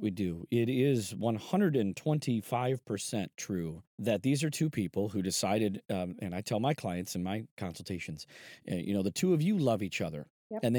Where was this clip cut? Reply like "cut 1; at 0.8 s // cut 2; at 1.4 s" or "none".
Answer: cut 1; at 3.9 s